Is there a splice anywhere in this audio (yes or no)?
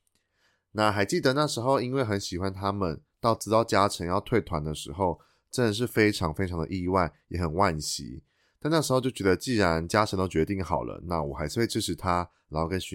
no